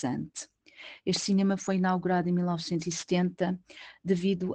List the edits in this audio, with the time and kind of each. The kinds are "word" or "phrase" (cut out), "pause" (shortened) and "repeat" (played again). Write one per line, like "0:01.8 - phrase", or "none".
none

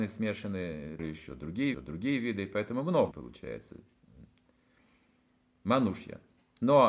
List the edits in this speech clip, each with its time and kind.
0:01.0 - word
0:01.7 - repeat
0:03.1 - word

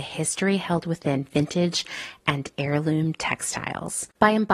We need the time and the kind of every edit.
none

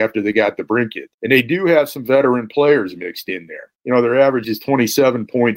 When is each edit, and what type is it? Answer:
0:01.1 - pause
0:03.7 - pause
0:04.4 - word

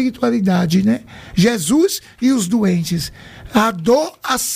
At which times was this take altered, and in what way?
none

